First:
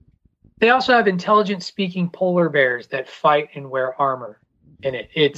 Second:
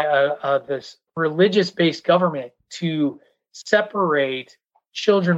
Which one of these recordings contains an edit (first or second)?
second